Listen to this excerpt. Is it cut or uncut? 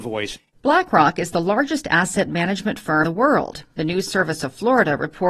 cut